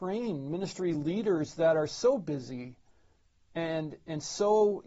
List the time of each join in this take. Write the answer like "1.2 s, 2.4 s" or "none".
none